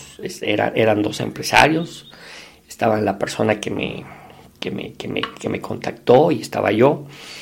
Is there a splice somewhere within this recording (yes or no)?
no